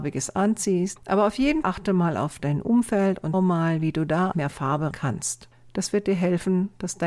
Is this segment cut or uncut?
cut